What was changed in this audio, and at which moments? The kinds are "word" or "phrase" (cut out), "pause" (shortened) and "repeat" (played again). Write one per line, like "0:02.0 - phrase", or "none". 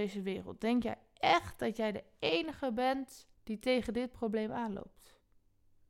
0:03.3 - pause